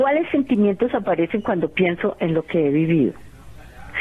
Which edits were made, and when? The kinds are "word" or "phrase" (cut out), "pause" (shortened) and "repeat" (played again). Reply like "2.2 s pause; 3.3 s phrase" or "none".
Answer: none